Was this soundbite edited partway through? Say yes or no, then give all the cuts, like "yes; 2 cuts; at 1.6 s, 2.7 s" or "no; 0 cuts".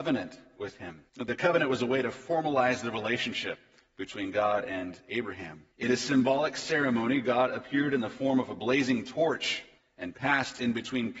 yes; 4 cuts; at 1.1 s, 3.8 s, 5.7 s, 9.8 s